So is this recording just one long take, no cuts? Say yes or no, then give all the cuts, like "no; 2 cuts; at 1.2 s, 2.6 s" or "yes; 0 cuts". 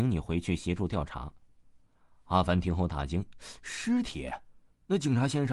yes; 0 cuts